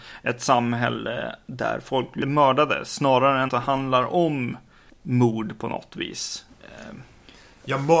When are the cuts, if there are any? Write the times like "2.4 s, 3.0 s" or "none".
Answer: 3.5 s